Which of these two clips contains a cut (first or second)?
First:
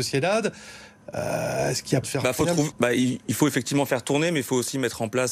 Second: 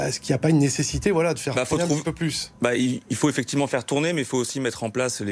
first